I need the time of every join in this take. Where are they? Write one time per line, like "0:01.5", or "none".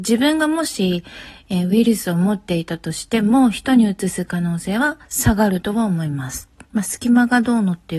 0:06.6